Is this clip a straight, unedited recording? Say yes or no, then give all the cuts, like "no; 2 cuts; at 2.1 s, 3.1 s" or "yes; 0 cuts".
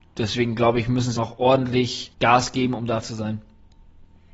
no; 3 cuts; at 1.2 s, 2.1 s, 3.0 s